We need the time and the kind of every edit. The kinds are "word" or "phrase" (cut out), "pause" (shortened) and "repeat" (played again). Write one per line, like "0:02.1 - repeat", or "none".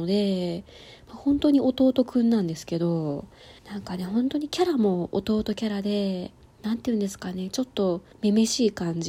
0:03.6 - pause
0:06.5 - pause
0:08.1 - pause